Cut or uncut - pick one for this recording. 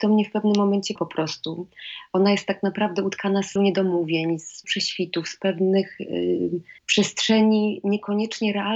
cut